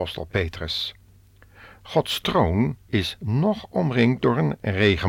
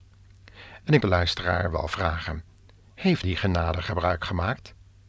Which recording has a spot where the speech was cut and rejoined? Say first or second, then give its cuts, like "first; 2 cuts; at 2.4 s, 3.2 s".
second; 2 cuts; at 1.0 s, 3.2 s